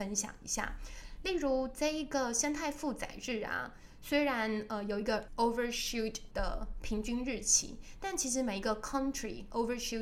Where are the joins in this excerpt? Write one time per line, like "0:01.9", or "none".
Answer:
0:05.3
0:06.3